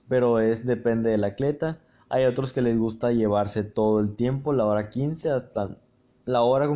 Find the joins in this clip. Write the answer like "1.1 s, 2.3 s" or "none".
none